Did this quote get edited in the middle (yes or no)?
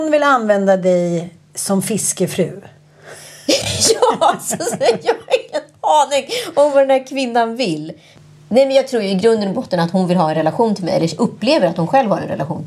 no